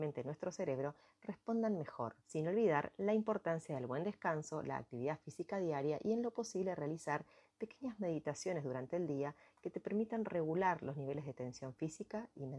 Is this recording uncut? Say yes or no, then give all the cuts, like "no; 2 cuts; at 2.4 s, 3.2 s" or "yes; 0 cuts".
no; 1 cut; at 2.2 s